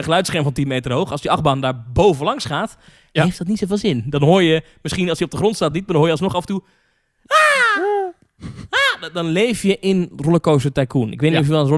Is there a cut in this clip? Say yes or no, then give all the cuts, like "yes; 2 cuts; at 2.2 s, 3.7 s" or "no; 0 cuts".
no; 0 cuts